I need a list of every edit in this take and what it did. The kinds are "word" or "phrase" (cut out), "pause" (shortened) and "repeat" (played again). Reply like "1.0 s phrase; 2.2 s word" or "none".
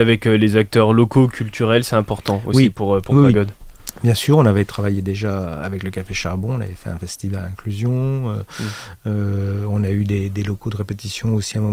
none

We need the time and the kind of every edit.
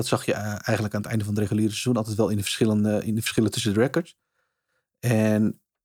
none

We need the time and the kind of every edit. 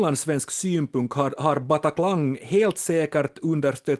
none

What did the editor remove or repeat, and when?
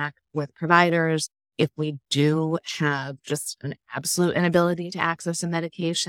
none

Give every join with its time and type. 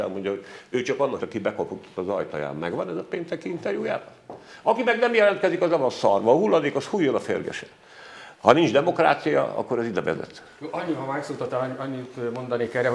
1.2 s word

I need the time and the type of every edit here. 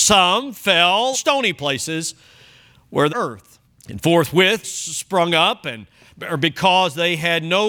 1.1 s word; 3.1 s phrase; 3.6 s pause; 4.6 s word

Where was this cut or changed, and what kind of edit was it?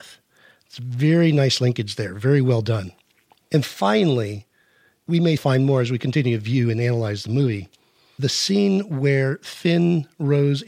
5.4 s word

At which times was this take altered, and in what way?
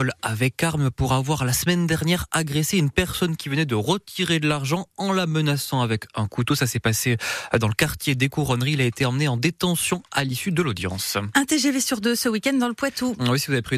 none

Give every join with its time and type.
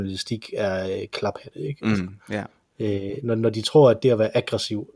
none

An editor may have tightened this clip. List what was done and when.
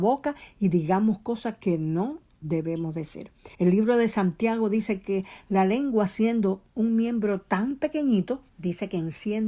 3.5 s pause; 8.5 s pause

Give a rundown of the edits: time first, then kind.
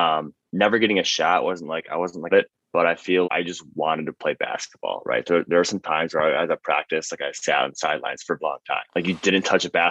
2.3 s phrase; 3.2 s word; 8.4 s word; 8.9 s pause

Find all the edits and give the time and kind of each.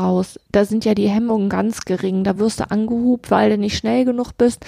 none

